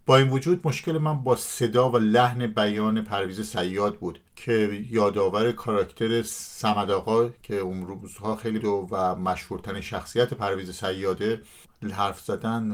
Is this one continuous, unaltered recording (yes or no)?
no